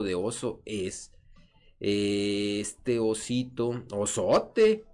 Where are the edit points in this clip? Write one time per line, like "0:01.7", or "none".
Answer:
none